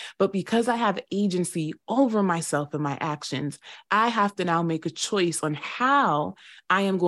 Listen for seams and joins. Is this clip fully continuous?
yes; 0 cuts

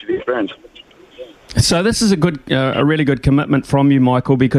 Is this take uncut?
yes; 0 cuts

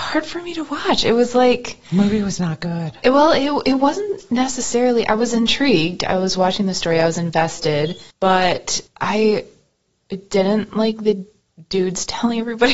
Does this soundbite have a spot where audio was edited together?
no; 0 cuts

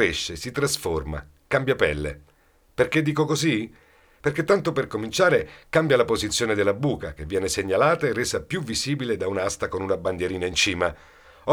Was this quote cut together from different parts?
no; 0 cuts

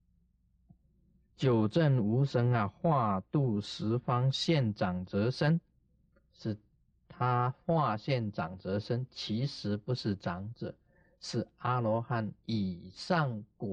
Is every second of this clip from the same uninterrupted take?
yes; 0 cuts

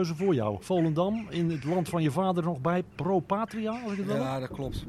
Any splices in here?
no; 0 cuts

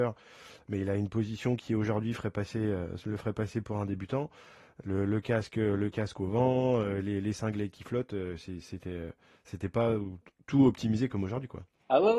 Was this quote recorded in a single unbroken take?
yes; 0 cuts

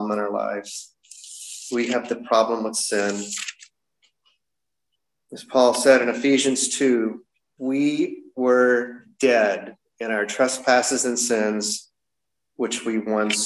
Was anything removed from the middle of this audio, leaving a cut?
no; 0 cuts

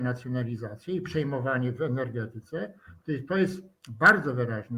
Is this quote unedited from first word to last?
yes; 0 cuts

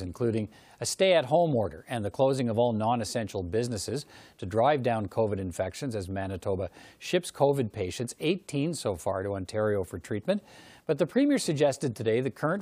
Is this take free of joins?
yes; 0 cuts

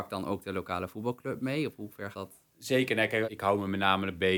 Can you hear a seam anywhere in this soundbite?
yes; 3 cuts; at 2.1 s, 2.5 s, 3.2 s

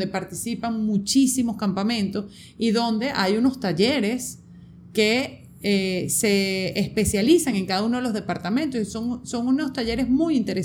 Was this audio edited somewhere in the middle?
no; 0 cuts

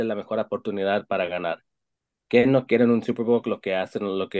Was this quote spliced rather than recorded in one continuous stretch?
no; 0 cuts

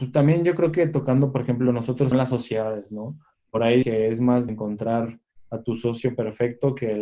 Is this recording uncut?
no; 3 cuts; at 2.1 s, 3.8 s, 4.5 s

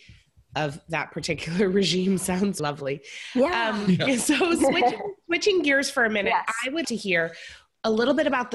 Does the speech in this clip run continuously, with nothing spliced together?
no; 2 cuts; at 2.6 s, 6.8 s

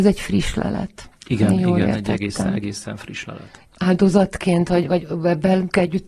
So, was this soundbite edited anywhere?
no; 0 cuts

